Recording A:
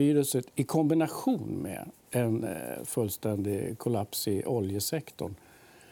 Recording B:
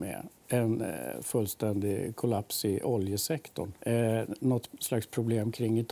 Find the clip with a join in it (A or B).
B